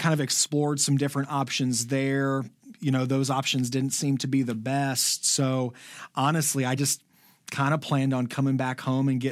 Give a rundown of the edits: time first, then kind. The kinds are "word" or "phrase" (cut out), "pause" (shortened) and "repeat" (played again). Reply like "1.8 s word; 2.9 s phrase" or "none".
none

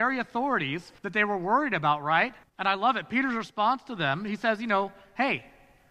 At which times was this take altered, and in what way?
1.0 s pause; 2.4 s pause

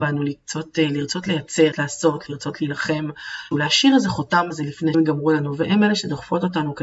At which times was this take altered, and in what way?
1.7 s word; 3.5 s phrase; 4.5 s word; 4.9 s word

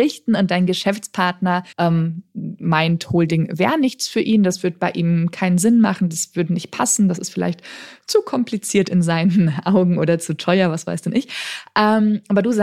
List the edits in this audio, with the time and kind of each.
1.7 s pause

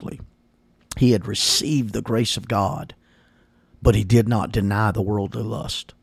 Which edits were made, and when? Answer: none

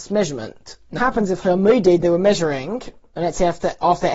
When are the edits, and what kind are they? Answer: 1.0 s word

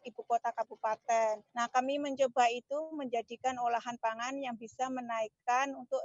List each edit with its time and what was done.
1.5 s pause

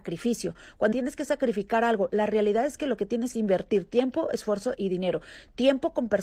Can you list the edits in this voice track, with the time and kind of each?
0.9 s word; 3.3 s phrase; 4.8 s word

